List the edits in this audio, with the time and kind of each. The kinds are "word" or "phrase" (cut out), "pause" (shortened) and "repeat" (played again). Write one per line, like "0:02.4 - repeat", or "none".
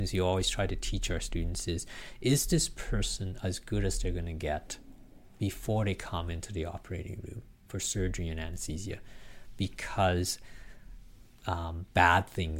none